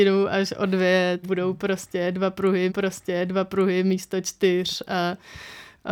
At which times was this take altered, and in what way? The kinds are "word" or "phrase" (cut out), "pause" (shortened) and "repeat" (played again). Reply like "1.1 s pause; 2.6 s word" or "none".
1.2 s word; 2.7 s repeat